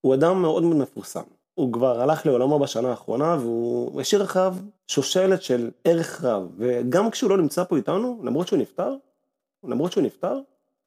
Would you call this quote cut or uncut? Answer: cut